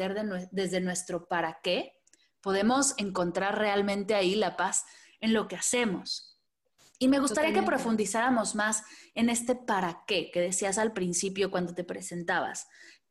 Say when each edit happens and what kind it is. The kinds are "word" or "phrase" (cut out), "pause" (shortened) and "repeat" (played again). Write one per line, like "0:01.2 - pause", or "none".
none